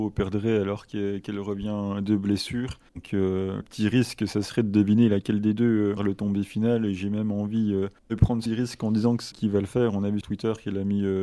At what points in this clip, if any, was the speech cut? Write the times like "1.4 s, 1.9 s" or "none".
2.9 s, 3.6 s, 6.0 s, 8.0 s, 8.5 s, 9.3 s, 10.2 s